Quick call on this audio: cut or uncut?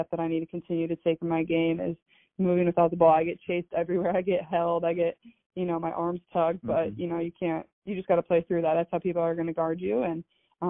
cut